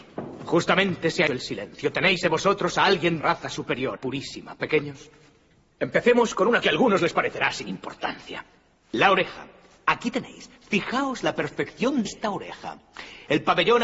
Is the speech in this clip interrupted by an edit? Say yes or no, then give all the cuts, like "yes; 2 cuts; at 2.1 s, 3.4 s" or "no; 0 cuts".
yes; 6 cuts; at 1.3 s, 2.2 s, 3.2 s, 4.0 s, 6.6 s, 12.0 s